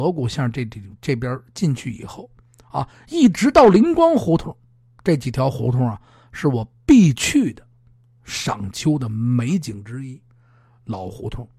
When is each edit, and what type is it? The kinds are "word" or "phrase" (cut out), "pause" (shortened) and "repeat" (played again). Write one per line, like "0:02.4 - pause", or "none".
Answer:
none